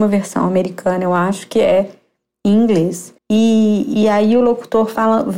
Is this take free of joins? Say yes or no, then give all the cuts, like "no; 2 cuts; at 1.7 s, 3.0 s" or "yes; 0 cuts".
no; 1 cut; at 3.2 s